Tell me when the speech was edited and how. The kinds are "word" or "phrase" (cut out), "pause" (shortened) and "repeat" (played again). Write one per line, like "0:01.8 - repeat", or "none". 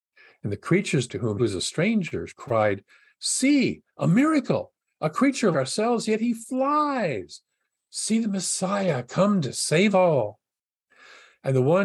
0:01.1 - word
0:01.4 - word
0:05.5 - word
0:09.9 - word